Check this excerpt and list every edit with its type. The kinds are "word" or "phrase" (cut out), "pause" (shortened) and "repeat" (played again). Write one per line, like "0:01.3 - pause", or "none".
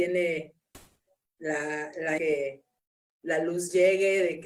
0:01.0 - pause
0:02.2 - phrase